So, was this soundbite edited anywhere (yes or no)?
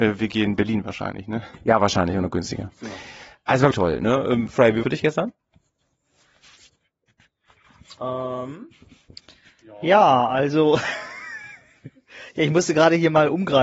yes